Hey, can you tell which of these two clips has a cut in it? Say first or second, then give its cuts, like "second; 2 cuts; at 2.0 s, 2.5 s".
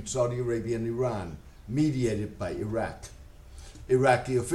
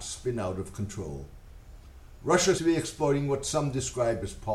second; 1 cut; at 2.6 s